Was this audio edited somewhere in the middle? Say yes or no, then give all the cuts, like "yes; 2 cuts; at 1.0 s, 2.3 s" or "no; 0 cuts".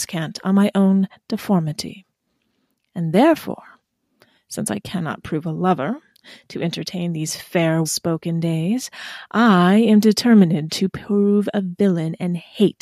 yes; 1 cut; at 7.8 s